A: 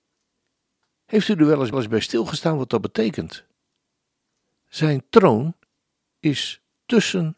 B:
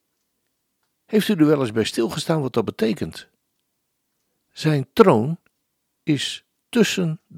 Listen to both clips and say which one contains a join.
A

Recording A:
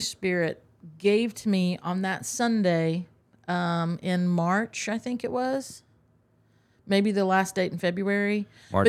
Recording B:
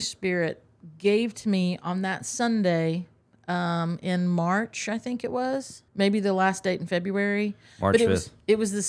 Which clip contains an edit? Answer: B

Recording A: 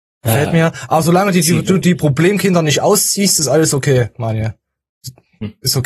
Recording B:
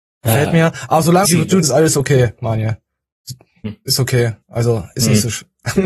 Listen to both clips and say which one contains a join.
B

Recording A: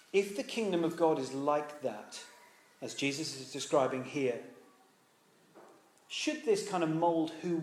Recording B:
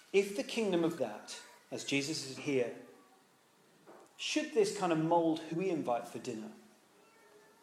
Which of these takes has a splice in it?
B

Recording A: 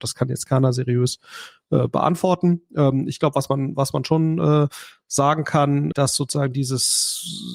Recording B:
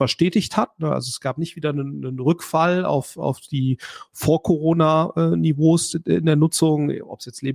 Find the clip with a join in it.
A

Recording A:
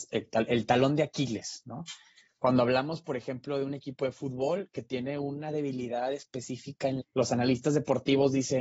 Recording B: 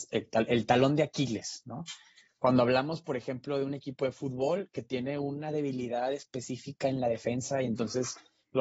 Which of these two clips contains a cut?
A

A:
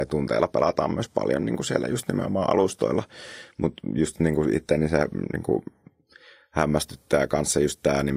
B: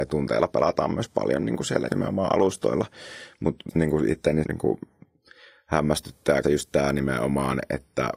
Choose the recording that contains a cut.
B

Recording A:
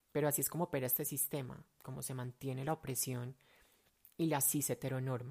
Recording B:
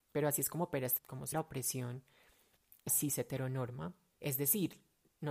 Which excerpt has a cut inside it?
B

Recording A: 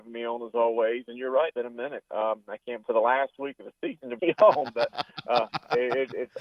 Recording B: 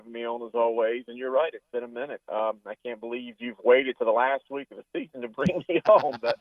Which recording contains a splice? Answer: A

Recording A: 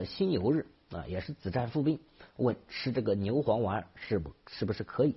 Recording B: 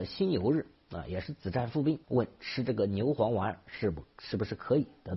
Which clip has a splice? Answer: B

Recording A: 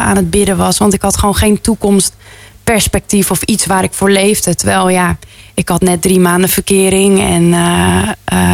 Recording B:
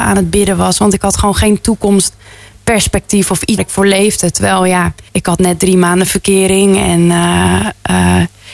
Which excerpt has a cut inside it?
B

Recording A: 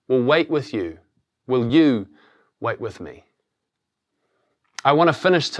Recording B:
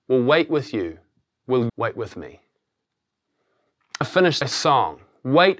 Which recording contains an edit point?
B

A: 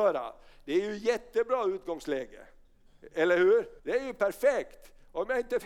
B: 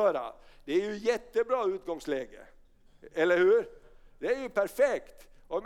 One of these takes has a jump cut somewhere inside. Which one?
A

